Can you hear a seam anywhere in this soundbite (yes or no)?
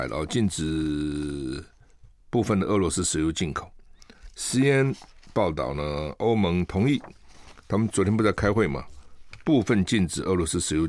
no